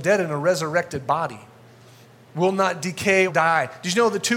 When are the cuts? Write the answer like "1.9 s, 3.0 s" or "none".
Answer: 2.0 s, 3.3 s